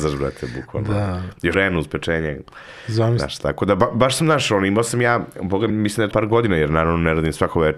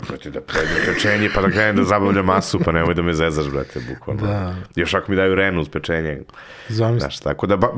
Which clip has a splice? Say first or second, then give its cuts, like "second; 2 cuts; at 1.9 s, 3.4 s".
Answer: first; 3 cuts; at 1.5 s, 5.7 s, 6.1 s